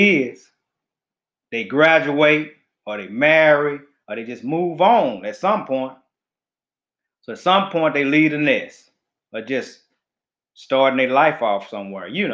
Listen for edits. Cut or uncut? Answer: uncut